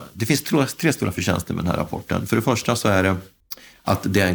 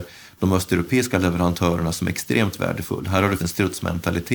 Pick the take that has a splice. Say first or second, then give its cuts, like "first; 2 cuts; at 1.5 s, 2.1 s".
second; 1 cut; at 3.4 s